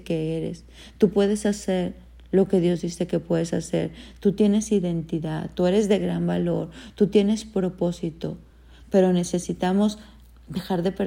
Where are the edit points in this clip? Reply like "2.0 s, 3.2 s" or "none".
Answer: none